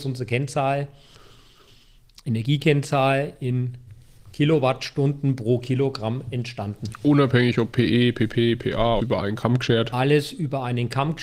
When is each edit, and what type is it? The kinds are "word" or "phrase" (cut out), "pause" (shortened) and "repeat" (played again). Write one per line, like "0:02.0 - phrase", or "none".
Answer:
0:09.0 - phrase